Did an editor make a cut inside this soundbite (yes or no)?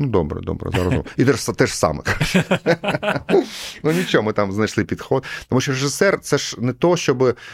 no